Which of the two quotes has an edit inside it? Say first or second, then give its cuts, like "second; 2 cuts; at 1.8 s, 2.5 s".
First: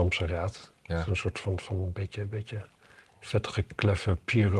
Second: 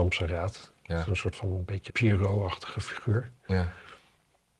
second; 2 cuts; at 1.3 s, 1.9 s